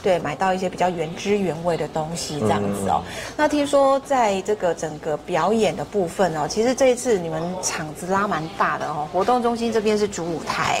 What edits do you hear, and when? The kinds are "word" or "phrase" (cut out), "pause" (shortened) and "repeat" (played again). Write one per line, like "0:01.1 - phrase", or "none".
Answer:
none